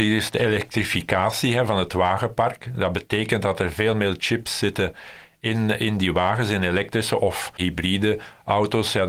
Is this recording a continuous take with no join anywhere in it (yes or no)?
yes